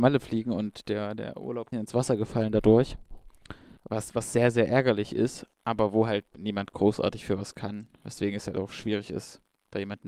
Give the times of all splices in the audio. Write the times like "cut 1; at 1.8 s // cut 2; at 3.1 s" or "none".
cut 1; at 1.7 s // cut 2; at 3.8 s // cut 3; at 5.5 s // cut 4; at 6.3 s